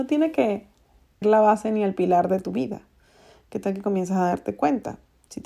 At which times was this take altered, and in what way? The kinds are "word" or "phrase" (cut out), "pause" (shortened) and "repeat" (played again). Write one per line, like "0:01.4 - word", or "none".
0:01.2 - word